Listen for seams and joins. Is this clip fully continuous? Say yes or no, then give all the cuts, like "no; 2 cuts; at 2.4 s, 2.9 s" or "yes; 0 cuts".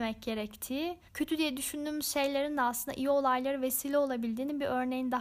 no; 1 cut; at 1.1 s